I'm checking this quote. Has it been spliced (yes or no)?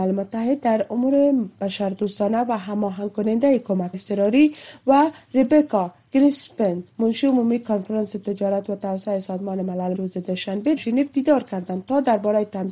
yes